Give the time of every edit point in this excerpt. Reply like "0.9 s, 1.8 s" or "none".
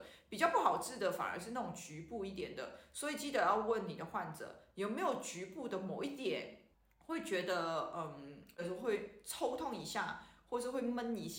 6.7 s